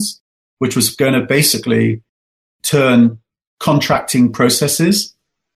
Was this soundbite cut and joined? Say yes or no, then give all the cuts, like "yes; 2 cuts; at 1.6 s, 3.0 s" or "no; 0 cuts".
no; 0 cuts